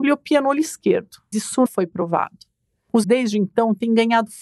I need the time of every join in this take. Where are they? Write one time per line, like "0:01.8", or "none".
0:01.3
0:01.7
0:03.0